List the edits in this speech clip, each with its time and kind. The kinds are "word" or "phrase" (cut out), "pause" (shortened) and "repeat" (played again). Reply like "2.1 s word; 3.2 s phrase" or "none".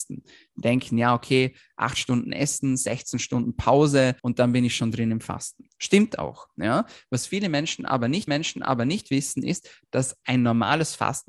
4.2 s pause; 8.3 s repeat; 10.2 s word